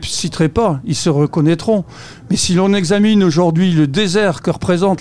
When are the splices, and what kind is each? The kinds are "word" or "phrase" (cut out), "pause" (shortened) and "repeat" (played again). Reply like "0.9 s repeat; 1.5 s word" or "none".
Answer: none